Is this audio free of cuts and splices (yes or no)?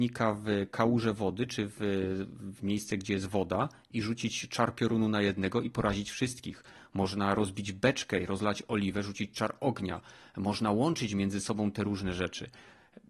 yes